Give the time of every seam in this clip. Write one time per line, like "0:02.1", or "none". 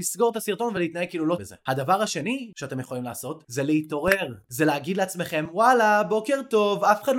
0:01.4